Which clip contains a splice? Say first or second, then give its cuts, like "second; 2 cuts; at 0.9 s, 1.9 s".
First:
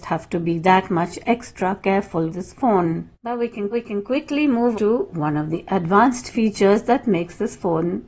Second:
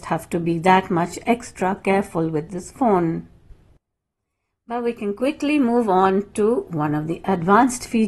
first; 4 cuts; at 2.3 s, 3.1 s, 3.7 s, 4.7 s